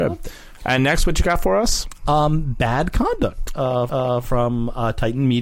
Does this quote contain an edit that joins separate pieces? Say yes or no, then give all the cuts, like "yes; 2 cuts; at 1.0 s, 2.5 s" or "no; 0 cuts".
yes; 1 cut; at 3.9 s